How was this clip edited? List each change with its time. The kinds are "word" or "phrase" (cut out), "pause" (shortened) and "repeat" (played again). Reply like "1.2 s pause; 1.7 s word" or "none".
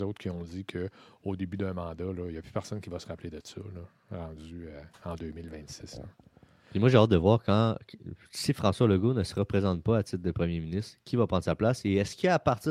none